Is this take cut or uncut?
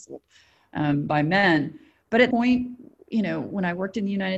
cut